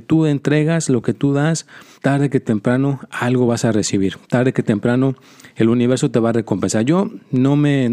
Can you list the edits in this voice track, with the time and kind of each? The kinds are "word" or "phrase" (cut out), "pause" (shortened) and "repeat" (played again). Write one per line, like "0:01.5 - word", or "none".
0:01.9 - pause